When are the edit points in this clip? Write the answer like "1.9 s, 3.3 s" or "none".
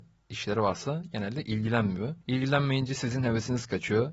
2.2 s